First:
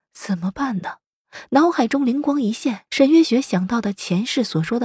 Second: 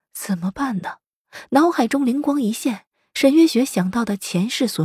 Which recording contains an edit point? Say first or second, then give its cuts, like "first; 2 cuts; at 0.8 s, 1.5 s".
first; 1 cut; at 2.9 s